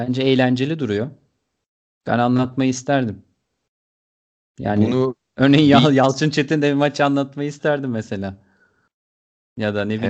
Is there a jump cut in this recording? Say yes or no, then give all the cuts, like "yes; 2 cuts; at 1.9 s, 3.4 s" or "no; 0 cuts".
no; 0 cuts